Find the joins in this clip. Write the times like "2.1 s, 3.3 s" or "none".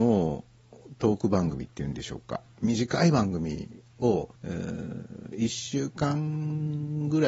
4.4 s